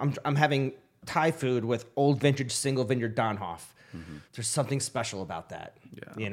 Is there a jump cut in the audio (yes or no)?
yes